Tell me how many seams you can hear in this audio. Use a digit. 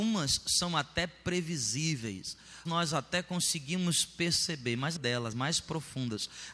3